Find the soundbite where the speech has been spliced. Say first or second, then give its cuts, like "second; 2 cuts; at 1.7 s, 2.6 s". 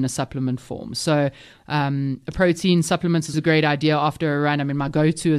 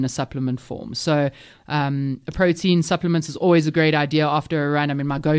first; 1 cut; at 3.3 s